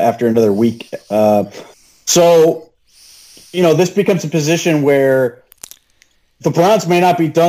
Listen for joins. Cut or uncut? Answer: uncut